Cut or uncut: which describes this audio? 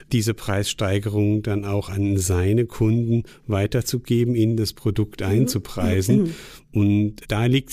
uncut